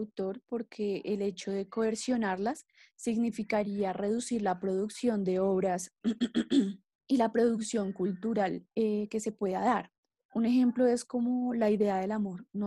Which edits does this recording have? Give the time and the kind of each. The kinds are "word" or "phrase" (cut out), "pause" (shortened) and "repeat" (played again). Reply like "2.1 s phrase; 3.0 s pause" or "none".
8.7 s pause